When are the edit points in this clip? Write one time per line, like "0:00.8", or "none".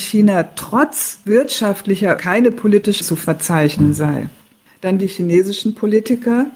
0:02.2
0:03.0
0:05.0